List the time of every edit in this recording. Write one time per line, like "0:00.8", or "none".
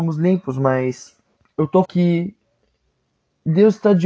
0:01.4
0:01.8